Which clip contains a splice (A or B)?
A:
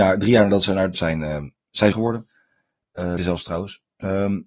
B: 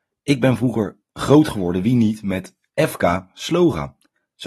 A